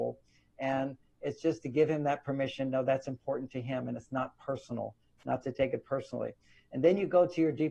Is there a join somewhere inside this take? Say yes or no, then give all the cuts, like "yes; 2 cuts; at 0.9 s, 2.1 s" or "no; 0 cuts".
no; 0 cuts